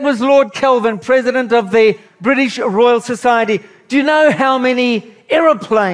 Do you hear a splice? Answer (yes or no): no